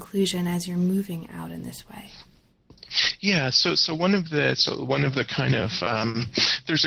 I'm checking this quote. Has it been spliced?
no; 0 cuts

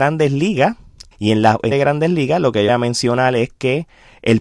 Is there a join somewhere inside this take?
yes; 3 cuts; at 1.1 s, 1.7 s, 2.7 s

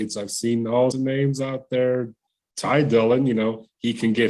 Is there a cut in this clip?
yes; 1 cut; at 0.9 s

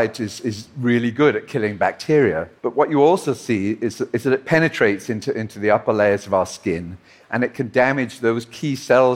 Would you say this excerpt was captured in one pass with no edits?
no; 1 cut; at 2.6 s

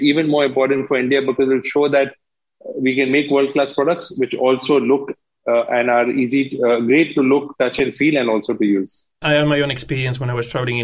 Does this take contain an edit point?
no; 0 cuts

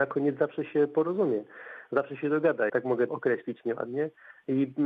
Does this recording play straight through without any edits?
no; 2 cuts; at 2.7 s, 3.1 s

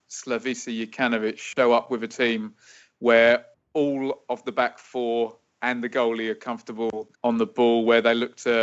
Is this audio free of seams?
no; 2 cuts; at 3.5 s, 7.1 s

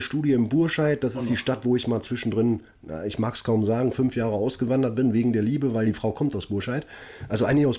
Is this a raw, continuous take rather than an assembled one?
yes; 0 cuts

